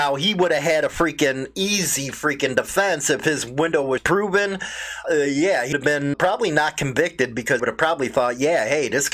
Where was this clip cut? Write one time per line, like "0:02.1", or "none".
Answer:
0:04.0
0:05.0
0:05.7
0:06.1
0:07.6